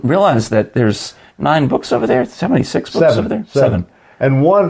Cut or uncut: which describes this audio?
uncut